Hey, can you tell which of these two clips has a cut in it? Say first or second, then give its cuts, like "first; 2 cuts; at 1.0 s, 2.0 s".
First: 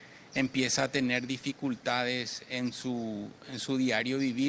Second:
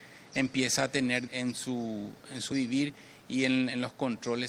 second; 2 cuts; at 1.3 s, 2.5 s